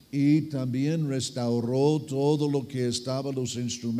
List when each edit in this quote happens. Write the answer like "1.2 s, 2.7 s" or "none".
none